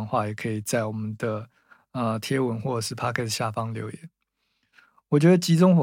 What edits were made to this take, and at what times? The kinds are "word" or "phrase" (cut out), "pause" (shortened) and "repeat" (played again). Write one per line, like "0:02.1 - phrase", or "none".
none